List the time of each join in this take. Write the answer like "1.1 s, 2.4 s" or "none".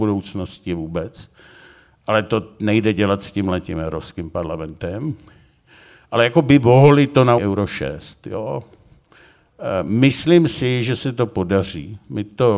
7.4 s